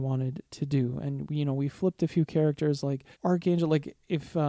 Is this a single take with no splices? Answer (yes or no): no